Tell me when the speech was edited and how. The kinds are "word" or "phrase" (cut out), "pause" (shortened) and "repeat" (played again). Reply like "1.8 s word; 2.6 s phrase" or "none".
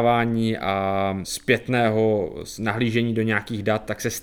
1.2 s word